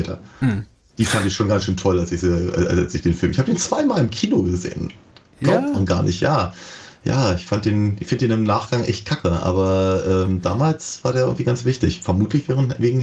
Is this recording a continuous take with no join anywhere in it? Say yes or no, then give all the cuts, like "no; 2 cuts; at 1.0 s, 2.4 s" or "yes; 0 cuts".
yes; 0 cuts